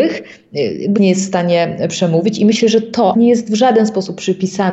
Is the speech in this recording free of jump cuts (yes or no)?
no